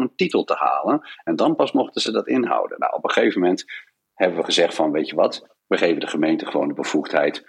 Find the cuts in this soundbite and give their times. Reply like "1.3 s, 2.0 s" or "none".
none